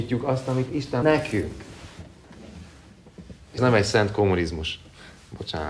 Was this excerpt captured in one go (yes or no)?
no